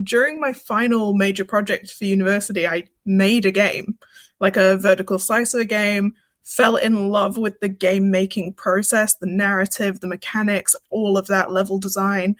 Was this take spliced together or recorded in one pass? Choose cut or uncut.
uncut